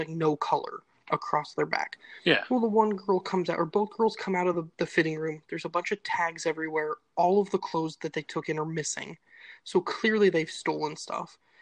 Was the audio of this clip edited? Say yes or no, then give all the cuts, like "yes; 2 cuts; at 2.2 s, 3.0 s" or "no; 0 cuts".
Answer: no; 0 cuts